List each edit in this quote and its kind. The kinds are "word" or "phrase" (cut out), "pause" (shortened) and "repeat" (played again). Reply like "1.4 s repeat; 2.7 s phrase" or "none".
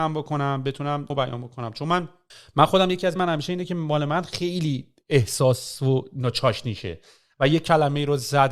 1.1 s word; 2.3 s pause; 3.2 s word